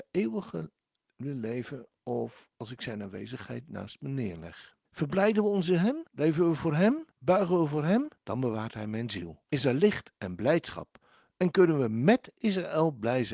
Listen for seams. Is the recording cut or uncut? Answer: cut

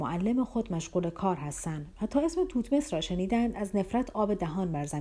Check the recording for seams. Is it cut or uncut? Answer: uncut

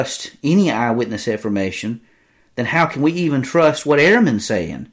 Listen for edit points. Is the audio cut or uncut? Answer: uncut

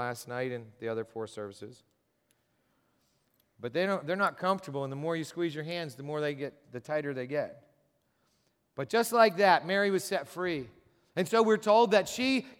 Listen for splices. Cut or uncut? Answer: uncut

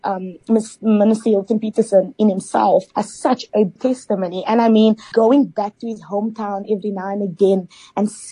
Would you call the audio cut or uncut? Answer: cut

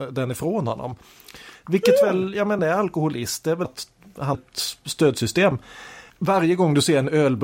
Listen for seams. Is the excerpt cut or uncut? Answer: cut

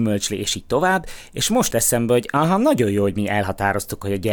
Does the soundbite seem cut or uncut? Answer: cut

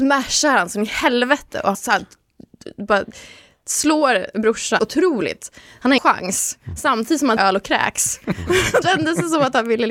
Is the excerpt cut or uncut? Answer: cut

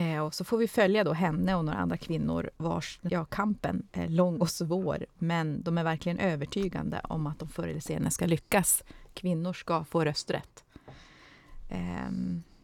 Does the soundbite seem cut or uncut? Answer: cut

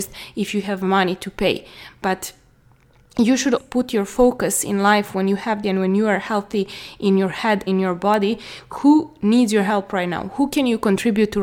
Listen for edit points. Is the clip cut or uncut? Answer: cut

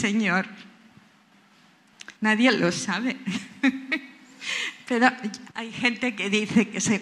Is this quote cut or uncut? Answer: cut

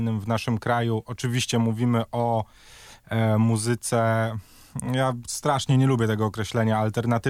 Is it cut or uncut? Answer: uncut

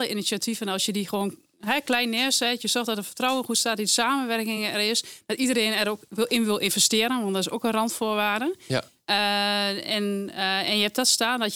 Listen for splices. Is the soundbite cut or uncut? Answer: uncut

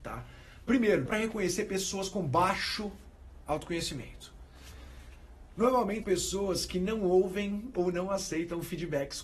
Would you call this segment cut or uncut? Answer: cut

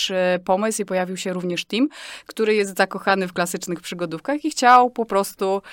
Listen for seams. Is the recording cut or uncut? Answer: uncut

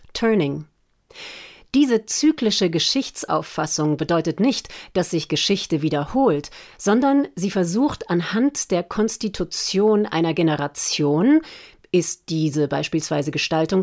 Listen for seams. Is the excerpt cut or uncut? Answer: uncut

